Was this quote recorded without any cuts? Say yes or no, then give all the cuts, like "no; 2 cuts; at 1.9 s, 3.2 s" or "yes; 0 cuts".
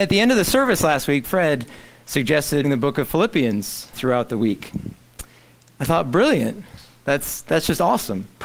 no; 3 cuts; at 1.2 s, 2.6 s, 3.9 s